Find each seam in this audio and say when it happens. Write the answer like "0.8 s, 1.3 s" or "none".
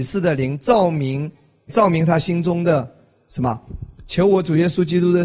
1.7 s